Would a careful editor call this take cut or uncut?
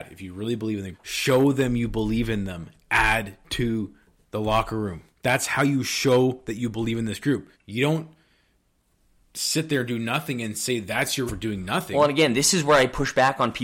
cut